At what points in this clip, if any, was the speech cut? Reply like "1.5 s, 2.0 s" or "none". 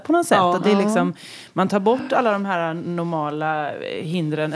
none